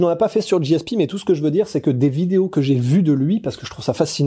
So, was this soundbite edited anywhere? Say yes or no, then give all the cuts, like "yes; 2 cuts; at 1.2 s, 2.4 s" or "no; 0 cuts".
no; 0 cuts